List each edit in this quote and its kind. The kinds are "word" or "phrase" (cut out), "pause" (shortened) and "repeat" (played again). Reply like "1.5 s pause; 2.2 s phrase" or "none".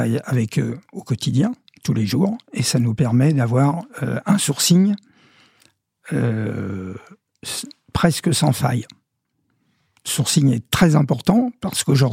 none